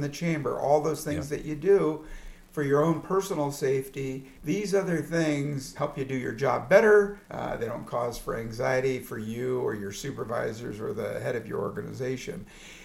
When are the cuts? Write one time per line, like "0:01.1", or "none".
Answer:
0:04.4
0:05.7
0:07.2

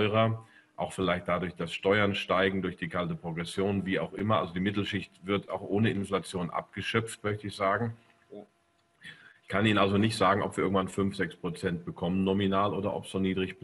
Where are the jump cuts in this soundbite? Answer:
none

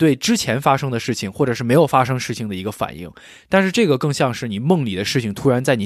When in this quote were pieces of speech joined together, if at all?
none

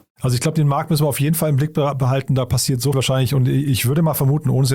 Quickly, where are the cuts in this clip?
0:02.9

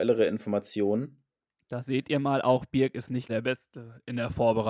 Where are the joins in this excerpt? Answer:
0:03.3

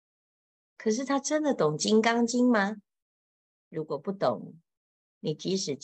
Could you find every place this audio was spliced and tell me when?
0:03.4

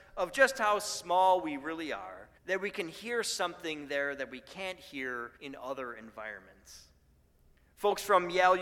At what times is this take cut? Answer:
0:02.4
0:05.4

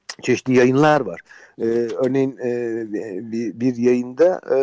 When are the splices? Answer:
none

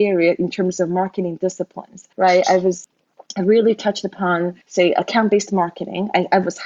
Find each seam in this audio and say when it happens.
0:02.1
0:04.6

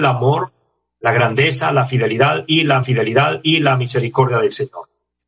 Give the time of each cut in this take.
0:02.8

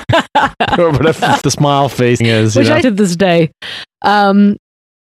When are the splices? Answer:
0:01.4
0:02.2
0:02.8

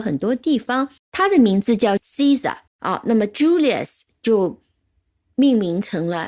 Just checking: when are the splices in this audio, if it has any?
0:01.0
0:02.0
0:02.7

